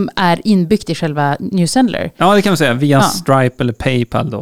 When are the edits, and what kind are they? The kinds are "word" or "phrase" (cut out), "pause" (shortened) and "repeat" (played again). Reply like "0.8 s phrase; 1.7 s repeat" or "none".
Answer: none